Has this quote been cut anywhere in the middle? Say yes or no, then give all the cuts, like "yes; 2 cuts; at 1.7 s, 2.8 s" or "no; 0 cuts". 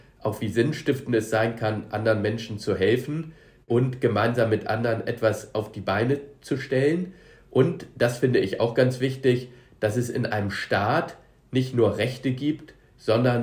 no; 0 cuts